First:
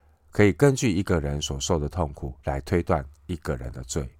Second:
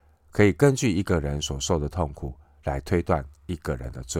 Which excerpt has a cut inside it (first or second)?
first